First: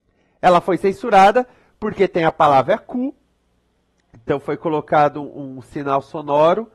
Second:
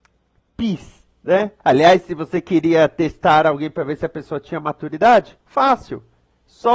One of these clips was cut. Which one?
second; 2 cuts; at 1.6 s, 5.4 s

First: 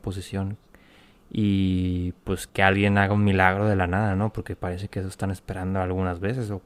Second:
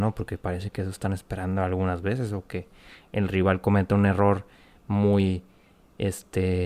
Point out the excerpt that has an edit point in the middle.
first; 1 cut; at 2.5 s

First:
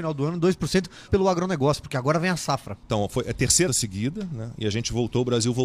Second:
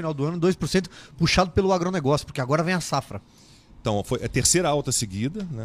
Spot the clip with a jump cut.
first; 3 cuts; at 1.1 s, 2.8 s, 3.7 s

